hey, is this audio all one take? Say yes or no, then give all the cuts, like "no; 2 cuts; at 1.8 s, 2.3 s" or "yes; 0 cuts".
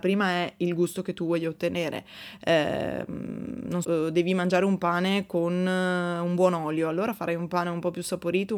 no; 1 cut; at 3.8 s